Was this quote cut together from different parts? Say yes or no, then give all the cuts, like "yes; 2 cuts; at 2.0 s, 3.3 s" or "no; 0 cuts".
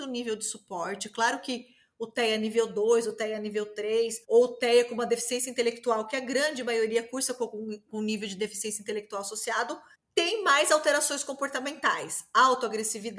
yes; 2 cuts; at 4.2 s, 9.9 s